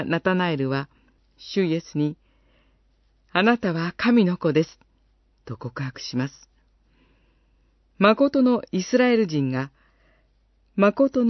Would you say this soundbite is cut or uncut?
uncut